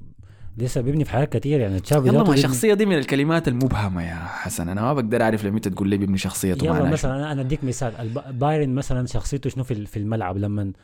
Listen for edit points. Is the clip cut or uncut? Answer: uncut